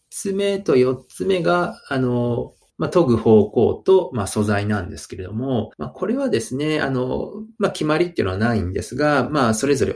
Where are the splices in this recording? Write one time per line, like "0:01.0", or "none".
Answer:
0:02.7
0:05.7